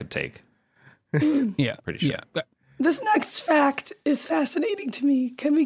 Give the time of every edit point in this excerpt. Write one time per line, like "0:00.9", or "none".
none